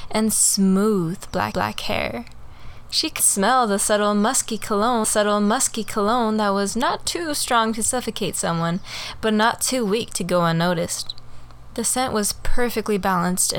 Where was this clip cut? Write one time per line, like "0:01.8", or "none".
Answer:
0:01.5
0:03.2
0:05.0